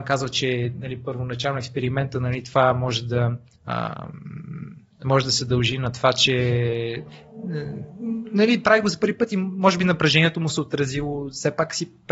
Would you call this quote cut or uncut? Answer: cut